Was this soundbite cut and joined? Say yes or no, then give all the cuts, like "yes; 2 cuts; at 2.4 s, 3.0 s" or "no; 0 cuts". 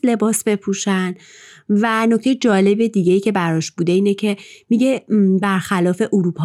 no; 0 cuts